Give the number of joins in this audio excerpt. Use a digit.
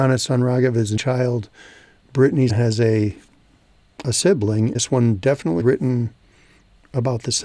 4